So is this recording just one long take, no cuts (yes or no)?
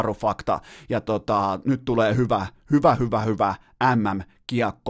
yes